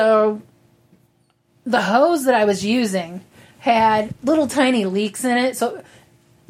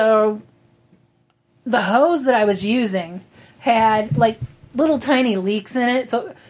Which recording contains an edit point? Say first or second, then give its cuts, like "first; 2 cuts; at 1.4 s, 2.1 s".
first; 1 cut; at 4.1 s